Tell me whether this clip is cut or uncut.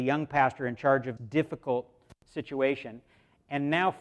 cut